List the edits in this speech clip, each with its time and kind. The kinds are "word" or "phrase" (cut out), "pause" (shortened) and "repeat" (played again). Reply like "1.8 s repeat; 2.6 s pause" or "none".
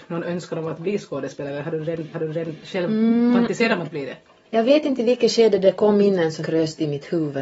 2.1 s repeat; 6.4 s phrase